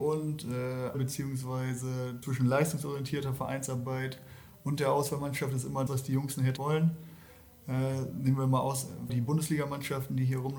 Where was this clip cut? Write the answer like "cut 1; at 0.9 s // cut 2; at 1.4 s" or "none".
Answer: cut 1; at 0.9 s // cut 2; at 2.2 s // cut 3; at 5.9 s // cut 4; at 6.6 s // cut 5; at 9.1 s